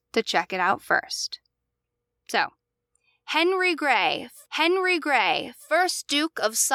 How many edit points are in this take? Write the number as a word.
one